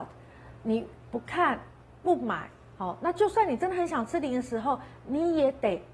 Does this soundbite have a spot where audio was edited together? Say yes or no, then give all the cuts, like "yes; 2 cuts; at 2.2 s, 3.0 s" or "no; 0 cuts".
no; 0 cuts